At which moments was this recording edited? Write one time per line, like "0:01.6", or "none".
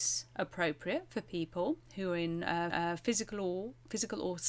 0:02.7